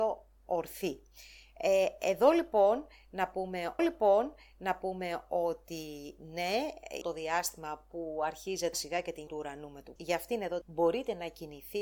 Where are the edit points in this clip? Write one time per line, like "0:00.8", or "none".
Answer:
0:03.8
0:07.0
0:08.7
0:09.3
0:10.0
0:10.6